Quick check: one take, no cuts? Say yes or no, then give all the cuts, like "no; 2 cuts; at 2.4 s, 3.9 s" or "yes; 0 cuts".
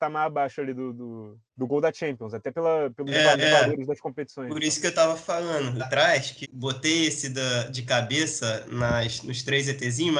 no; 4 cuts; at 1.5 s, 3.3 s, 5.8 s, 6.4 s